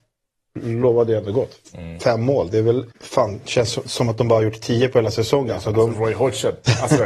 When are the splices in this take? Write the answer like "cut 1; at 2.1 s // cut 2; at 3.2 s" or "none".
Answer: cut 1; at 2.9 s